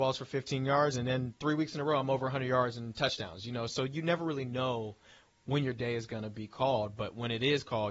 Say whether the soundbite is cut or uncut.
uncut